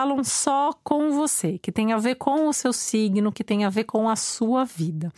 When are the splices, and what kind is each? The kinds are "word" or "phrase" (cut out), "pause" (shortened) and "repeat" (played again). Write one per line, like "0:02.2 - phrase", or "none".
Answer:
none